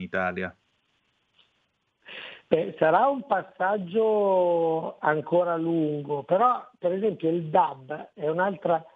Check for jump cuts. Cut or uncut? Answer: uncut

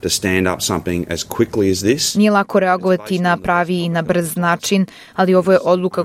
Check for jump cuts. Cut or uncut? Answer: uncut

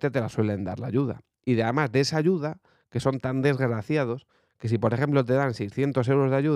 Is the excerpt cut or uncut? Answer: uncut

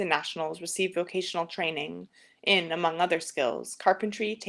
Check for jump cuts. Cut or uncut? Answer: uncut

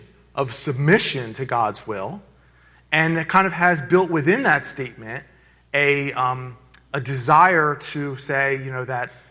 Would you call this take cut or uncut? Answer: uncut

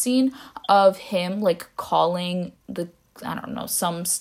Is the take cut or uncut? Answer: uncut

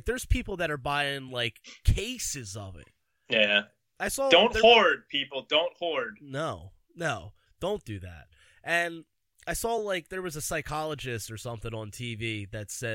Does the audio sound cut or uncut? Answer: uncut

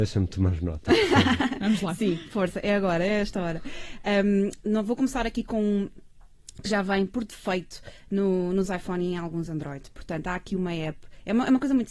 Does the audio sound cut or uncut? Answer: uncut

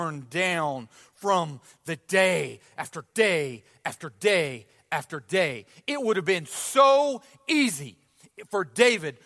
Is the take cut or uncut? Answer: uncut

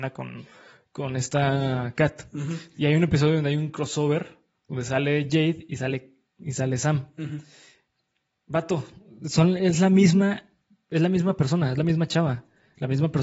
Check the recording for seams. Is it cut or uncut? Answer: uncut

